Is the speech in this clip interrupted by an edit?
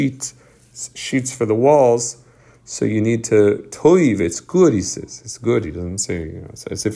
no; 0 cuts

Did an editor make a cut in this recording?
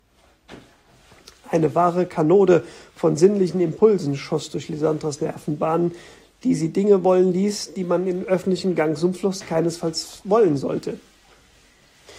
no; 0 cuts

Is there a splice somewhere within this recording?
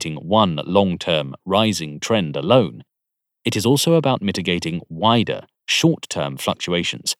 no; 0 cuts

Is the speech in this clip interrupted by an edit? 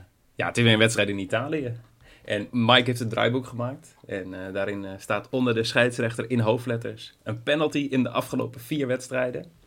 yes; 1 cut; at 2.5 s

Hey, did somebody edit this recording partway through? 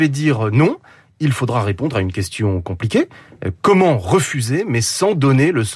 no; 0 cuts

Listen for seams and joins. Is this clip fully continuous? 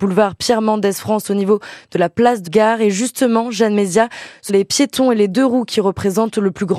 no; 2 cuts; at 2.5 s, 4.5 s

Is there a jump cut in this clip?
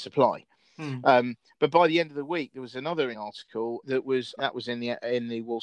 yes; 3 cuts; at 3.1 s, 3.8 s, 4.4 s

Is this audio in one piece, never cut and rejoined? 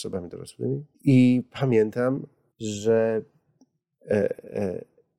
no; 2 cuts; at 0.9 s, 2.5 s

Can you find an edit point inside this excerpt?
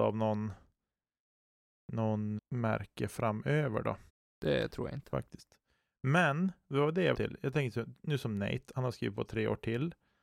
yes; 3 cuts; at 2.4 s, 4.1 s, 7.1 s

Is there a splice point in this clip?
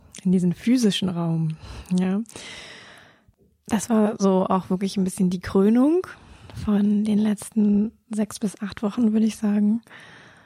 no; 0 cuts

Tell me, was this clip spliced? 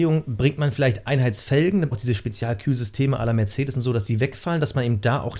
yes; 1 cut; at 1.9 s

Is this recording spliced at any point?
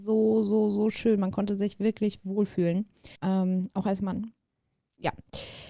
yes; 1 cut; at 3.2 s

